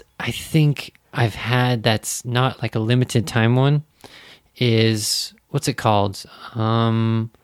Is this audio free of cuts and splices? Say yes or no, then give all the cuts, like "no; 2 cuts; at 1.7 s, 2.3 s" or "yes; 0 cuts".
yes; 0 cuts